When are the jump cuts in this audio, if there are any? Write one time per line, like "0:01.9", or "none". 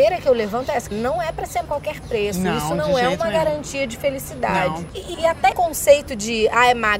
0:00.9
0:01.6
0:05.1
0:05.5

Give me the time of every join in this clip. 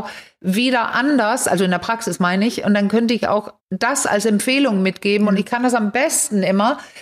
0:03.6

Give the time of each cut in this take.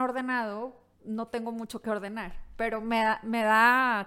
0:00.9

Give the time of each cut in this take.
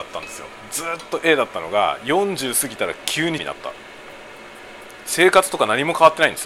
0:03.4

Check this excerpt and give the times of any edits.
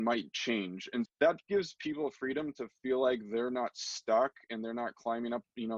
0:01.1

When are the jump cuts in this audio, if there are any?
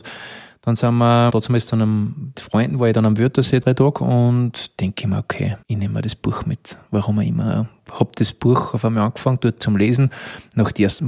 0:01.3
0:02.3
0:03.6
0:05.6

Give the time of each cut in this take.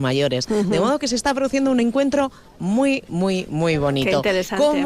none

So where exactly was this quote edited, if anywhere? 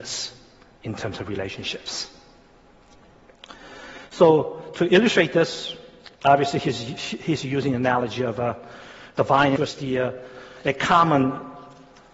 0:06.1
0:09.6

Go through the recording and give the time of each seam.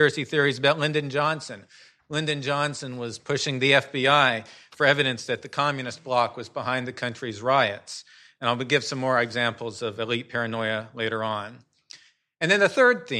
none

